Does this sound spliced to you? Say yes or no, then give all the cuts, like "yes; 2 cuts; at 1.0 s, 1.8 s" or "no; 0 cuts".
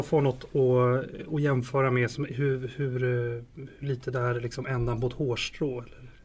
no; 0 cuts